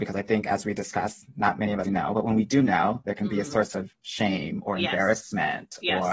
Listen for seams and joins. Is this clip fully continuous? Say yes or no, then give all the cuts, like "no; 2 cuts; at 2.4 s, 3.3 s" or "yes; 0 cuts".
no; 1 cut; at 1.8 s